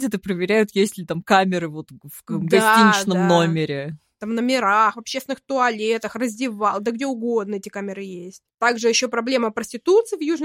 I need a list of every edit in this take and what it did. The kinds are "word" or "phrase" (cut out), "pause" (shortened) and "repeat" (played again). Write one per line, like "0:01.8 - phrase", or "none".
0:08.5 - pause